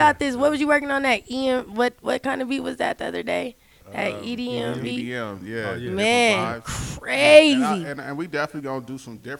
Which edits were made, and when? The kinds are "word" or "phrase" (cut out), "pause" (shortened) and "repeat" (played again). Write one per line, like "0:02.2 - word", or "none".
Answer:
none